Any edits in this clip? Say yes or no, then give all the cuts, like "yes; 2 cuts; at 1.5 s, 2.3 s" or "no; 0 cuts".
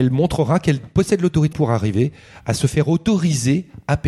yes; 1 cut; at 1.5 s